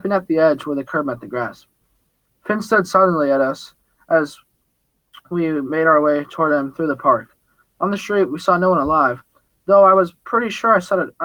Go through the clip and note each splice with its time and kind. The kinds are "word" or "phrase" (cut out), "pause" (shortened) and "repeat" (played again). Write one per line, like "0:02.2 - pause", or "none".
none